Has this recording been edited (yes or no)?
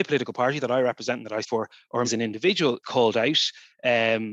yes